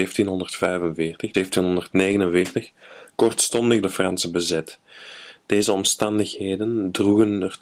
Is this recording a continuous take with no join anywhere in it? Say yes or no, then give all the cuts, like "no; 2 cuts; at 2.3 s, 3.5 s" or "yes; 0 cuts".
no; 2 cuts; at 1.3 s, 3.8 s